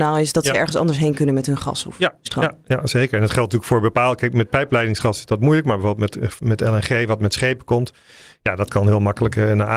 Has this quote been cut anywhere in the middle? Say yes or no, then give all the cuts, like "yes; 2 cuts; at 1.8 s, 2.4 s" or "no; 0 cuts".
no; 0 cuts